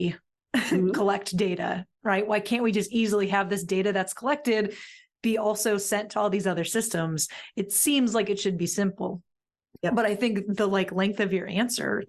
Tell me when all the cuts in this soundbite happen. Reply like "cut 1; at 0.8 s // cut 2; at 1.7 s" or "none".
none